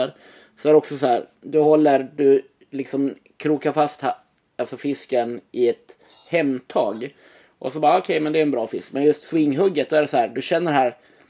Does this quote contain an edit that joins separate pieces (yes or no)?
no